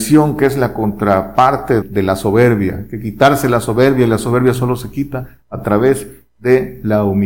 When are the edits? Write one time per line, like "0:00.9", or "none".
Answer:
0:01.8

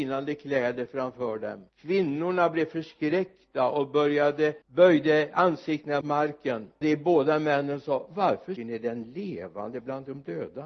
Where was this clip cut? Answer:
0:01.7
0:04.6
0:06.0
0:06.8
0:08.6

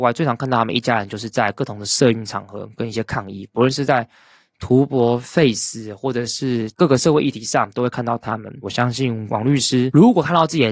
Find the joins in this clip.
none

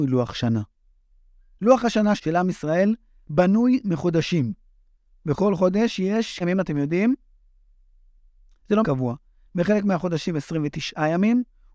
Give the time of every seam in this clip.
0:02.2
0:06.4
0:08.8

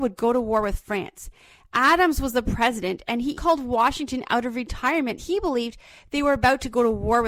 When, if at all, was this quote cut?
0:03.4
0:05.2

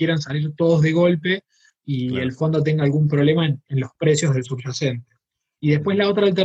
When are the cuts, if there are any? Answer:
none

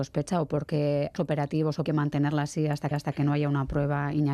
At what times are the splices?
0:01.2
0:01.8
0:02.9

